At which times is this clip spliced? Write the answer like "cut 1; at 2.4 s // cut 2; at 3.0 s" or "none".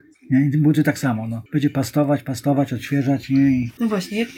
cut 1; at 1.5 s